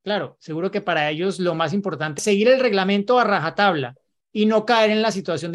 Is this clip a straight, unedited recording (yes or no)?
no